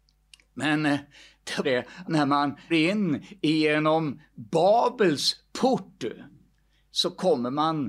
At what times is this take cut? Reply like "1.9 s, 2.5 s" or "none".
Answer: 1.6 s, 2.0 s, 2.7 s